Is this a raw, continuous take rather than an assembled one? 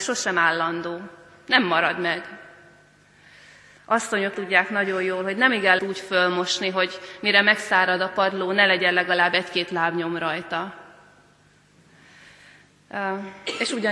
no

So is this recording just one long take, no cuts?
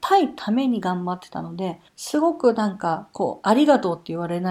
no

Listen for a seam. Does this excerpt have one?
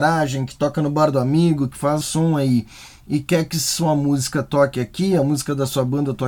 yes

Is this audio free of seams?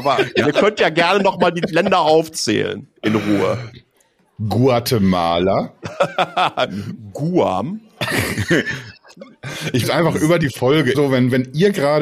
no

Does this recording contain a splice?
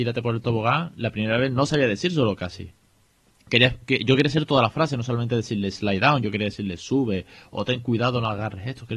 no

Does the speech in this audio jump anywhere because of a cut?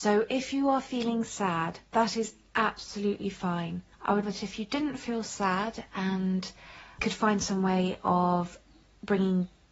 yes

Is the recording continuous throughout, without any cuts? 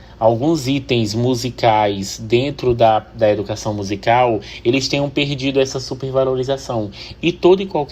yes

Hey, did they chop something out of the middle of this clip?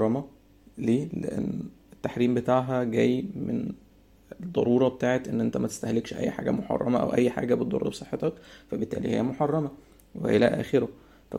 no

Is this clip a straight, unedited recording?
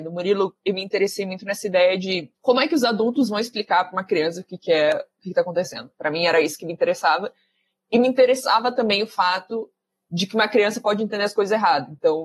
no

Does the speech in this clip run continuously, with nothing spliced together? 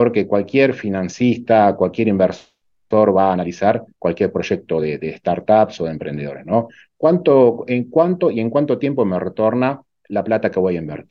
yes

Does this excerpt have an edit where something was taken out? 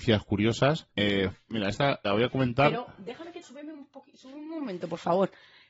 yes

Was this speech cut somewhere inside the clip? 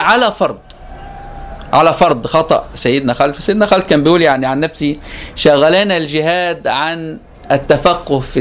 no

